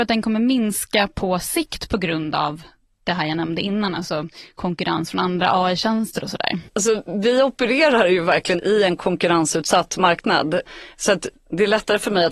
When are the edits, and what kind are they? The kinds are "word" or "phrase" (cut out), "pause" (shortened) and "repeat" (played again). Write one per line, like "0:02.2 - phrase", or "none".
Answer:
0:06.7 - pause